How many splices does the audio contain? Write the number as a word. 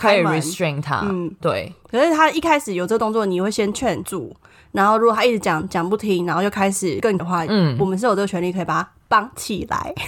one